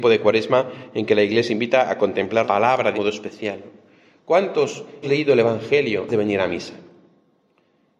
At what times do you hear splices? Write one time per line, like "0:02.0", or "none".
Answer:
0:01.5
0:02.4
0:02.9
0:05.0
0:06.1